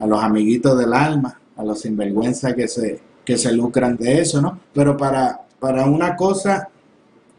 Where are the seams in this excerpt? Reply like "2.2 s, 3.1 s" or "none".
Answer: 1.5 s, 3.1 s, 4.0 s, 4.6 s